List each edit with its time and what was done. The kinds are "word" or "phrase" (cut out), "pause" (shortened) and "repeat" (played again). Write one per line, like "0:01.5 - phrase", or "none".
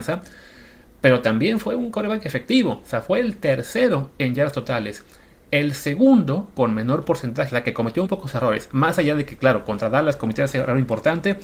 0:07.5 - phrase
0:08.1 - word